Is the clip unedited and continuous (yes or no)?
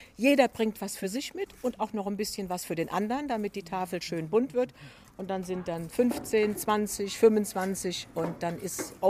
yes